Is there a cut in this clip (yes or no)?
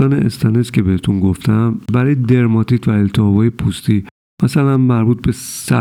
no